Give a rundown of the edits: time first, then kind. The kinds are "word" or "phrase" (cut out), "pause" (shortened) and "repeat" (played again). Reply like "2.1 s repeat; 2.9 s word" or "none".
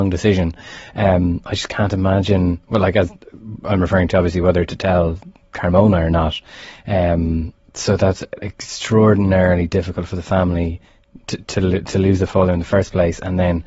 none